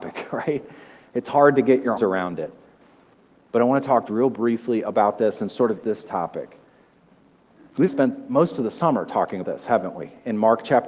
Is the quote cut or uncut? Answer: cut